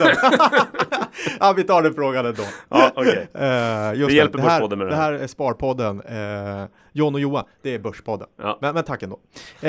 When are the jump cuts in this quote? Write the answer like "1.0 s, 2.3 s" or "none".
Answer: none